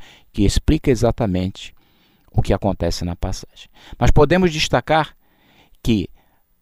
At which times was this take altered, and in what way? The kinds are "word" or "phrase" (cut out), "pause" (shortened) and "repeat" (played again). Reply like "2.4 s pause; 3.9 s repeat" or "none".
none